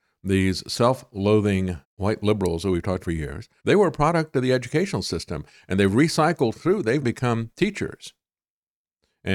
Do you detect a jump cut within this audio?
yes; 4 cuts; at 1.8 s, 3.0 s, 3.6 s, 7.0 s

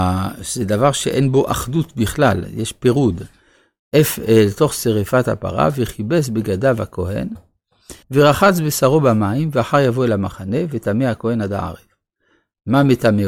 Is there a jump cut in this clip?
yes; 1 cut; at 8.0 s

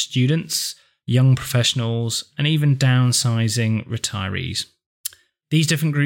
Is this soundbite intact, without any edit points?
yes; 0 cuts

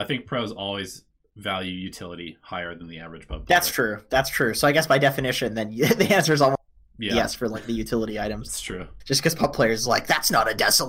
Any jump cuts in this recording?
no; 0 cuts

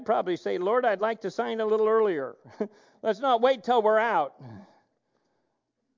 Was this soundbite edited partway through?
no; 0 cuts

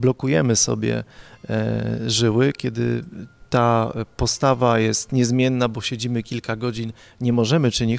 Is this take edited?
no; 0 cuts

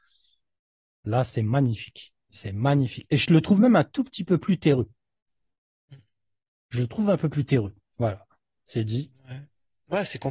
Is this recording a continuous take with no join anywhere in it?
no; 1 cut; at 2.2 s

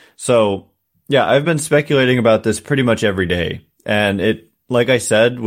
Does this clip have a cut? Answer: no; 0 cuts

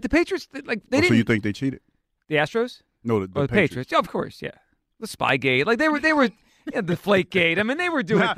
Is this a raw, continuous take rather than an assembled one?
yes; 0 cuts

